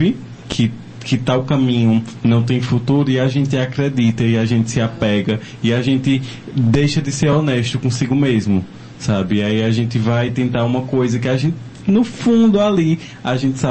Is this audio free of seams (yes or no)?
yes